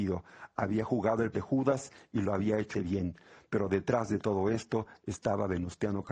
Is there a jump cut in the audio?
yes; 2 cuts; at 1.3 s, 2.7 s

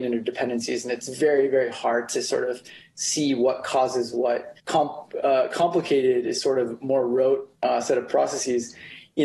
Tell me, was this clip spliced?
yes; 1 cut; at 4.6 s

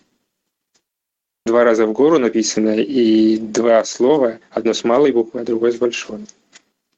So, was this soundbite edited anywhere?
yes; 1 cut; at 1.5 s

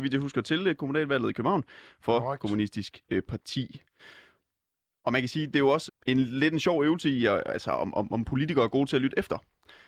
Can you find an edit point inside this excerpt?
yes; 1 cut; at 5.9 s

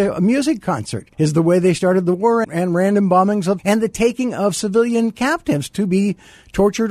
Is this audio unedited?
no; 3 cuts; at 1.1 s, 2.4 s, 3.6 s

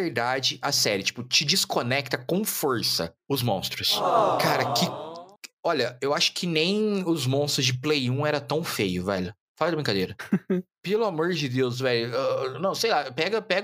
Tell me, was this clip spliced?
no; 0 cuts

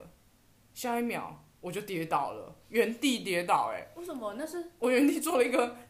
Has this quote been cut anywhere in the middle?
no; 0 cuts

